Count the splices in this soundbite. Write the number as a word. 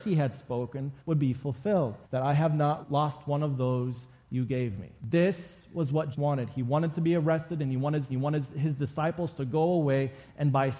six